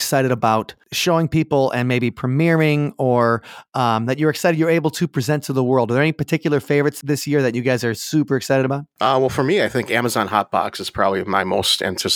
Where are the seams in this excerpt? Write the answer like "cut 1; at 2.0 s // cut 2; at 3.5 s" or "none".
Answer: none